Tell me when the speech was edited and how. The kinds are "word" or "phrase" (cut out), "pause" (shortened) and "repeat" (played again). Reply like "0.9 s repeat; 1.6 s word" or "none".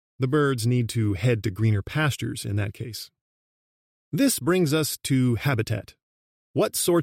none